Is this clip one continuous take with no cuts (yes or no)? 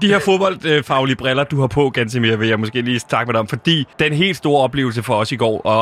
no